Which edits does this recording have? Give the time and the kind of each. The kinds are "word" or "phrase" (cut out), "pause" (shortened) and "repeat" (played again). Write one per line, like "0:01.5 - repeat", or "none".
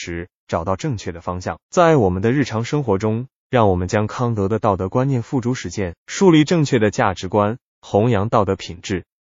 0:01.6 - pause
0:06.0 - pause